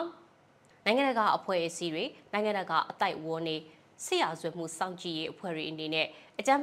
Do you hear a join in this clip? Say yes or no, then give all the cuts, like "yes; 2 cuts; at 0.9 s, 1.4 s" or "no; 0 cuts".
no; 0 cuts